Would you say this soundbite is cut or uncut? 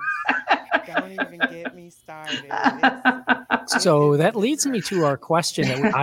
uncut